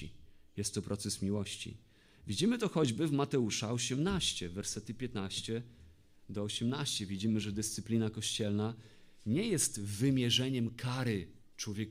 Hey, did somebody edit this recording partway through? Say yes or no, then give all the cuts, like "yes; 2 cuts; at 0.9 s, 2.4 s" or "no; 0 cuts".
no; 0 cuts